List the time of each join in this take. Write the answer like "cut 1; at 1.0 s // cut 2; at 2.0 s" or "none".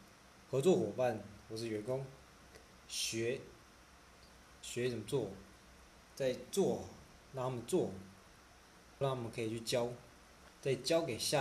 cut 1; at 9.0 s